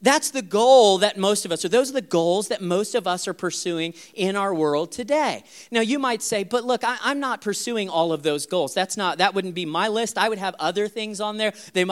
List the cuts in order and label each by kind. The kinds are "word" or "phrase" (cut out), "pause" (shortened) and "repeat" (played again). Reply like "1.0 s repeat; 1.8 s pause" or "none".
none